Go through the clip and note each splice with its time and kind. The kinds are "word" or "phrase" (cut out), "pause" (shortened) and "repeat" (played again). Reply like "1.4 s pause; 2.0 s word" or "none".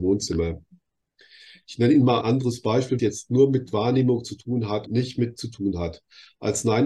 2.2 s word; 3.0 s word; 4.9 s word; 5.4 s word